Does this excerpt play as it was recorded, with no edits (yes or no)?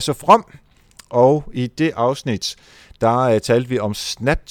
yes